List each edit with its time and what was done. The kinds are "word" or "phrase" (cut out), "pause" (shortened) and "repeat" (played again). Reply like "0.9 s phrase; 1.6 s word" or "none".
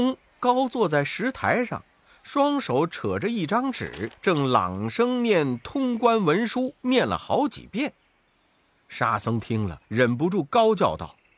4.2 s pause; 6.8 s pause; 9.8 s pause